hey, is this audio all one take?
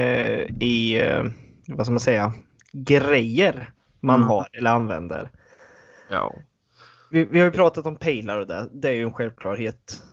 yes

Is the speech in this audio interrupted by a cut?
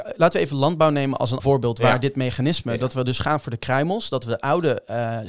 yes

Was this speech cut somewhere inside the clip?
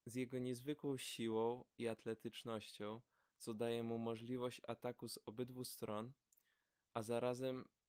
no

